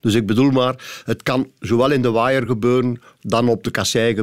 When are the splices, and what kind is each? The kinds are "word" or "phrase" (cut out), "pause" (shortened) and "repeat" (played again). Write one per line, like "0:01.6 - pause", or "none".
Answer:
none